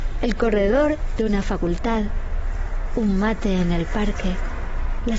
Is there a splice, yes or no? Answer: no